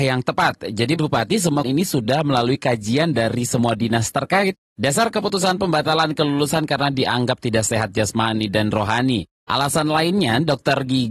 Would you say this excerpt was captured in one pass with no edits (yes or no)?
no